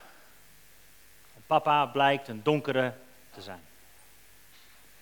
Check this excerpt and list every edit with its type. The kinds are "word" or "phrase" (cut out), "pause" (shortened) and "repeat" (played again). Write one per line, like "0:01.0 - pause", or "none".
0:03.3 - word